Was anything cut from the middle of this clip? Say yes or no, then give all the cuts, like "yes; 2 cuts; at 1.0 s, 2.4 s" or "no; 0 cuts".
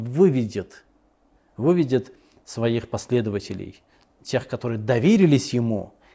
no; 0 cuts